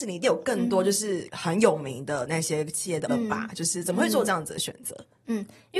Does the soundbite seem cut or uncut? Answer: cut